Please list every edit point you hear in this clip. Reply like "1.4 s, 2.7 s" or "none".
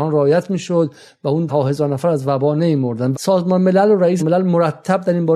1.5 s, 3.1 s, 4.2 s